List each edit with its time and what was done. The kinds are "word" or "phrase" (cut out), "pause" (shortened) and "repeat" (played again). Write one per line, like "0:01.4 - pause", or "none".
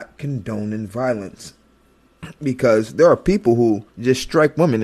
0:03.9 - pause